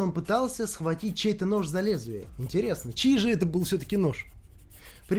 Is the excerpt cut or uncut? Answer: uncut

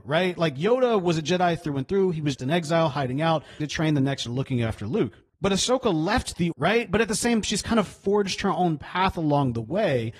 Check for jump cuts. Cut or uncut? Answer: cut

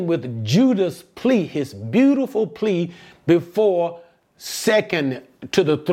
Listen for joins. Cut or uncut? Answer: uncut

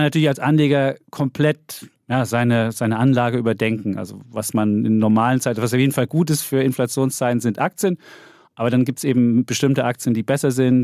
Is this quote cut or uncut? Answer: uncut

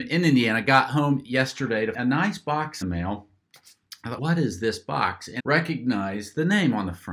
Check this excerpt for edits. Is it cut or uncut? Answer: cut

